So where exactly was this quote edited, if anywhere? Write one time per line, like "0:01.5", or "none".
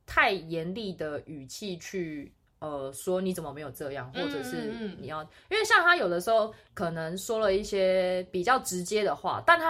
0:06.6